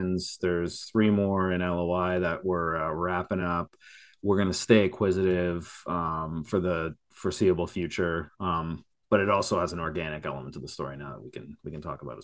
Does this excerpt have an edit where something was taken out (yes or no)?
no